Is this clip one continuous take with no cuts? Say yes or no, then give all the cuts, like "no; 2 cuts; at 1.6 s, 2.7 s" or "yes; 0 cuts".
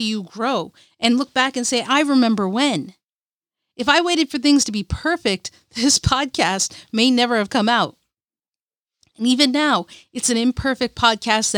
yes; 0 cuts